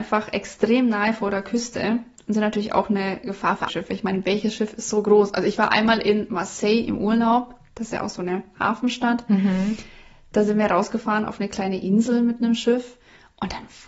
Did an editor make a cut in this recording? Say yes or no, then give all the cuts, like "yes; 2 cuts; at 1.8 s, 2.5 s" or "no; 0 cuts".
yes; 1 cut; at 3.7 s